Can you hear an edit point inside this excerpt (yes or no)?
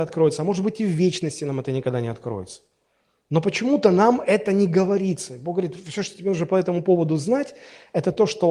no